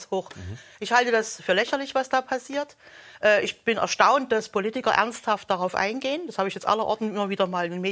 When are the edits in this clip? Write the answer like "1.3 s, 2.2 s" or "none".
none